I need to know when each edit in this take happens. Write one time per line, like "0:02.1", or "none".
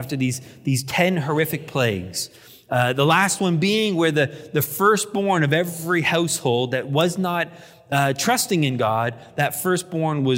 none